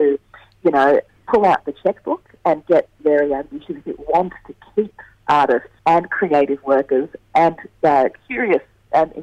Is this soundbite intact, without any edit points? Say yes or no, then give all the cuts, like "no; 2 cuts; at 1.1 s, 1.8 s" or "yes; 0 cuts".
no; 3 cuts; at 1.1 s, 3.0 s, 5.8 s